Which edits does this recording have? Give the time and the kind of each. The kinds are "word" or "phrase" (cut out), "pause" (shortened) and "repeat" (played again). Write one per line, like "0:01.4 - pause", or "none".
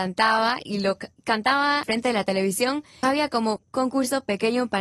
0:01.8 - word
0:03.0 - phrase
0:03.6 - word